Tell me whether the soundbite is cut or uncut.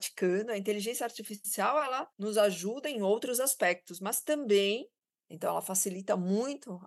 cut